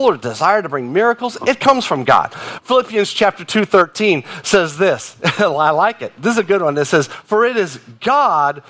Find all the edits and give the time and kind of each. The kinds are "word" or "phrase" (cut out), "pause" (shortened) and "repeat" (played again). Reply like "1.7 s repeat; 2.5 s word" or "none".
none